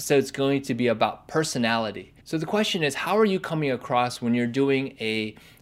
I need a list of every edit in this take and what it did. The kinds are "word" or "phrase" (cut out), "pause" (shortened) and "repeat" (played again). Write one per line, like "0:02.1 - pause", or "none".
0:02.2 - pause